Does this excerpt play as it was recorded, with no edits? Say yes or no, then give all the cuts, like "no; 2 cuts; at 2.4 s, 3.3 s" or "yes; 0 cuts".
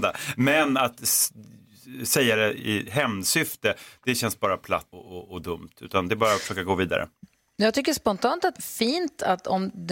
no; 2 cuts; at 4.9 s, 8.6 s